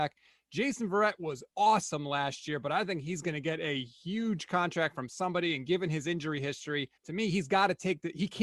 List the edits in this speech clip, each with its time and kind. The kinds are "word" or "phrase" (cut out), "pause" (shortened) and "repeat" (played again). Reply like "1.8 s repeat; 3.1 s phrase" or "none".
1.5 s pause; 7.0 s pause